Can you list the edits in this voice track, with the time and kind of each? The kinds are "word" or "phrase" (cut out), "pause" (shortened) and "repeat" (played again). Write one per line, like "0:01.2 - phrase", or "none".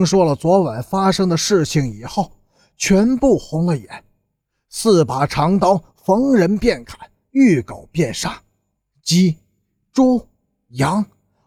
none